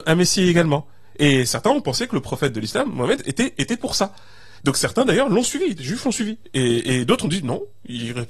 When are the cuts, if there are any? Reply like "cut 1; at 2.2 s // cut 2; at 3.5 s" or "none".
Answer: none